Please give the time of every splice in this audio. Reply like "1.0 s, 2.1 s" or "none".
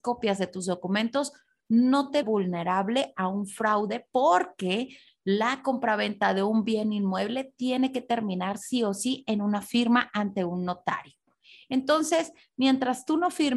2.2 s